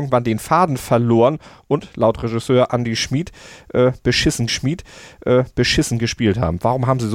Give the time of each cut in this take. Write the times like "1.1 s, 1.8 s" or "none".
4.5 s